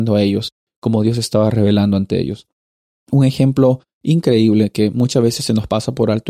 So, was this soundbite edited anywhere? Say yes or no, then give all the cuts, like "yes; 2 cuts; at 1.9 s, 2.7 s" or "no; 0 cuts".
no; 0 cuts